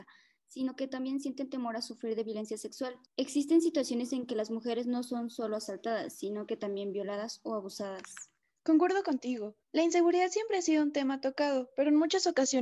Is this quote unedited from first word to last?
no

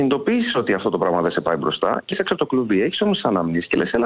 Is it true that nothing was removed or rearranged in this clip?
no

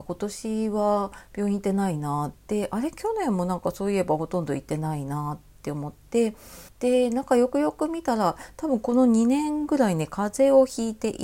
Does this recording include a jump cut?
yes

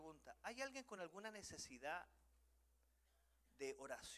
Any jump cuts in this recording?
no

